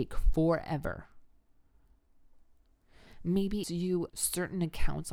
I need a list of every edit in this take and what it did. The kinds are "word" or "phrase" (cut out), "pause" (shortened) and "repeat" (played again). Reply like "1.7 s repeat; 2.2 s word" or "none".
3.6 s word; 4.1 s word